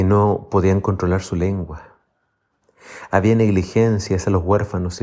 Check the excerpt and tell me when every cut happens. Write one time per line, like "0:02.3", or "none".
none